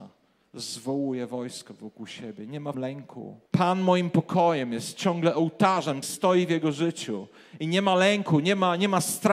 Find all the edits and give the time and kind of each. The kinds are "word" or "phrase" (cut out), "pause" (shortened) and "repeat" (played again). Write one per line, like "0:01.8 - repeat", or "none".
0:02.7 - word
0:03.5 - pause
0:06.0 - word